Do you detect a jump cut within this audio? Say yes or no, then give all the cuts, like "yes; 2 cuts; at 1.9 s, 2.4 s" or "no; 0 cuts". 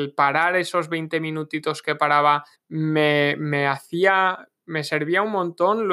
yes; 1 cut; at 2.5 s